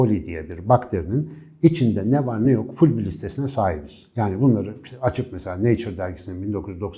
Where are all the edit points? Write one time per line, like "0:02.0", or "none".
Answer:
none